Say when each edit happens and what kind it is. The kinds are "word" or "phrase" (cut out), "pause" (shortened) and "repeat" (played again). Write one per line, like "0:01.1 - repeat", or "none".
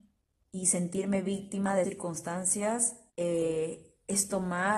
0:01.8 - word
0:03.1 - pause